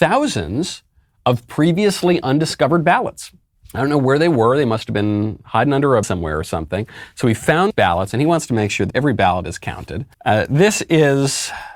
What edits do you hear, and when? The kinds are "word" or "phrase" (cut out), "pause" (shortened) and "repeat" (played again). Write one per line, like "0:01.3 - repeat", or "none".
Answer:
0:03.5 - pause
0:06.0 - word
0:07.7 - word
0:08.9 - word
0:10.1 - pause